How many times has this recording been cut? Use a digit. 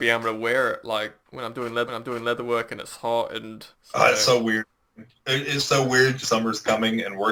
5